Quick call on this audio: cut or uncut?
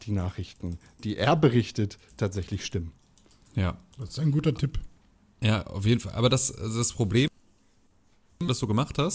uncut